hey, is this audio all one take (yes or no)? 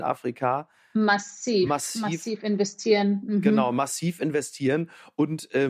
yes